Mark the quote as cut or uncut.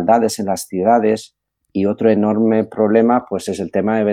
uncut